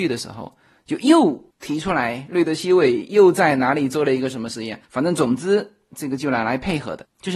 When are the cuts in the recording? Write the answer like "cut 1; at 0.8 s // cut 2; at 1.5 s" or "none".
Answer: cut 1; at 4.8 s